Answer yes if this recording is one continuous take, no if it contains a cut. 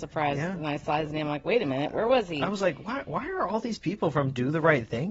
yes